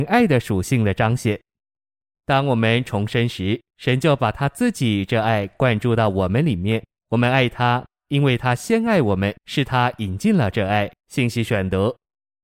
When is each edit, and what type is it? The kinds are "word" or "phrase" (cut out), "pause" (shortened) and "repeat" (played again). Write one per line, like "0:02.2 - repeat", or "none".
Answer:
0:03.7 - pause
0:07.0 - pause
0:09.4 - pause
0:11.0 - pause

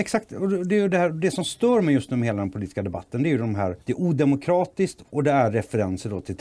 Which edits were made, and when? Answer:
0:03.8 - pause

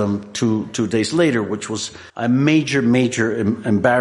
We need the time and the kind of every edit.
0:02.1 - pause

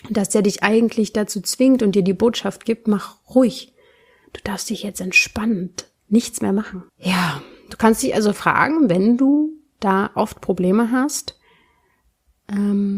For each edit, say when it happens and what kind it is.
0:06.9 - pause

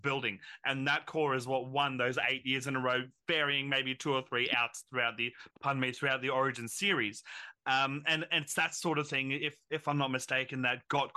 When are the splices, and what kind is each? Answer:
0:05.5 - pause

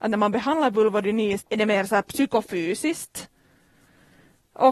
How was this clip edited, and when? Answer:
0:01.4 - word

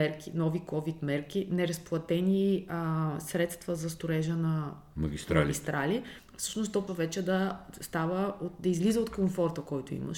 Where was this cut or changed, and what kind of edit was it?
0:06.9 - word

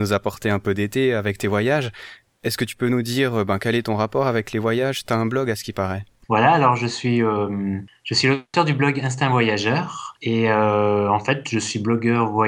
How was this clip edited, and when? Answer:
none

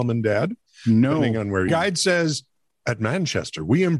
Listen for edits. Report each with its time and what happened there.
0:01.7 - phrase

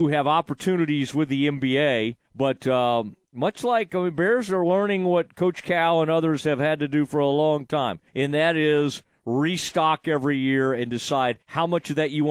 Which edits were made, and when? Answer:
0:02.2 - pause
0:08.1 - pause
0:11.4 - pause

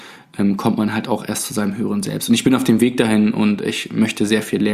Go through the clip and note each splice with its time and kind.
none

